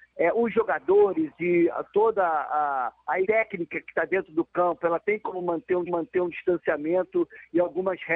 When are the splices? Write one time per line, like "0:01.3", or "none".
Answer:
0:03.2
0:05.9